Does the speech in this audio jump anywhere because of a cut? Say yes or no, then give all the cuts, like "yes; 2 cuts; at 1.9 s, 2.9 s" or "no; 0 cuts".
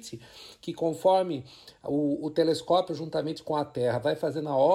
no; 0 cuts